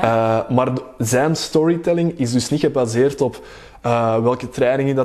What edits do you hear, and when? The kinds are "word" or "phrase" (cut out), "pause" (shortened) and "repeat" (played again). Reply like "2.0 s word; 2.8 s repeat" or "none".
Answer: none